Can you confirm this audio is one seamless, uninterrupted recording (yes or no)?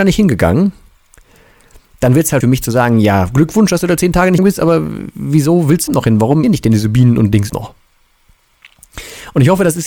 no